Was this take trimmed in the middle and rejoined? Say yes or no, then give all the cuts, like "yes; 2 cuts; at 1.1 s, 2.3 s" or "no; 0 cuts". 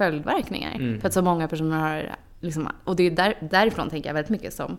no; 0 cuts